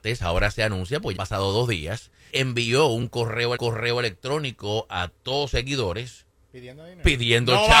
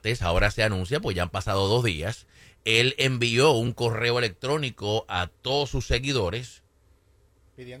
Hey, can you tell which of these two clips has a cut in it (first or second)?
first